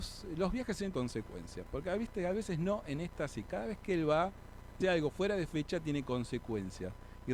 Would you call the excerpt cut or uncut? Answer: cut